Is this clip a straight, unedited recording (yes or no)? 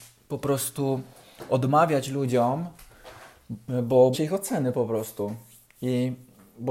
no